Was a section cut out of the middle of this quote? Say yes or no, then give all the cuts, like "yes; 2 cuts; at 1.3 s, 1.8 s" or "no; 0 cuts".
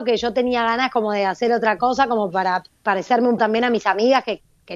yes; 1 cut; at 3.4 s